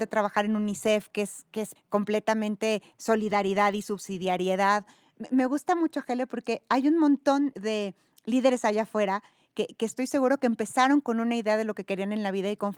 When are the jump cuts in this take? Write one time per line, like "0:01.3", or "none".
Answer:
0:01.8
0:07.5